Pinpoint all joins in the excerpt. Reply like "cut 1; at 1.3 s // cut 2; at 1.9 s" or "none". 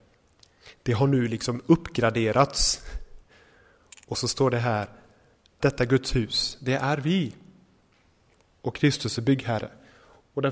cut 1; at 5.6 s